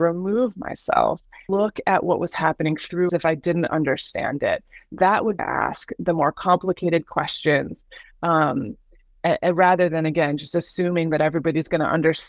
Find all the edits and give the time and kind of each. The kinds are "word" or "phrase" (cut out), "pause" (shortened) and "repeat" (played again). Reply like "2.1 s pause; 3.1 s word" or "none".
1.5 s word; 3.1 s phrase; 5.4 s phrase